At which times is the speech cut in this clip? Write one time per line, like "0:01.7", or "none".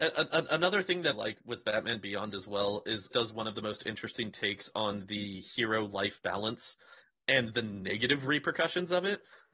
0:01.1
0:03.1